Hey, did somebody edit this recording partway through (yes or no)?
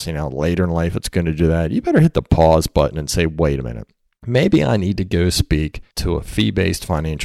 yes